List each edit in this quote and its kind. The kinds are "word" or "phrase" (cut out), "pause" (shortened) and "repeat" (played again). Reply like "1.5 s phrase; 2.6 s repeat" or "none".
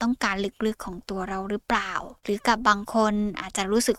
2.2 s pause